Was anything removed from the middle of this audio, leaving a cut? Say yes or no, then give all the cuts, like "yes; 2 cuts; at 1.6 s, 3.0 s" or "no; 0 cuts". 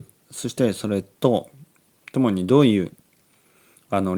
no; 0 cuts